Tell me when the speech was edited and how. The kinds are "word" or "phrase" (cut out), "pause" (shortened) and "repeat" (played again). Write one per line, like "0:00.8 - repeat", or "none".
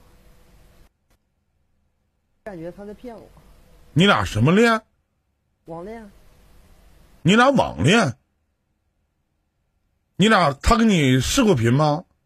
none